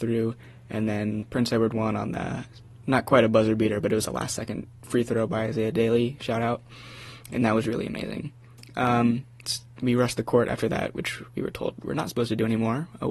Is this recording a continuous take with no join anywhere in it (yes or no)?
yes